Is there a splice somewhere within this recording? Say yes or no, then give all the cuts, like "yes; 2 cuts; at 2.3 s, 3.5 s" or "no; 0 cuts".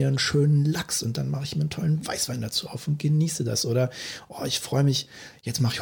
no; 0 cuts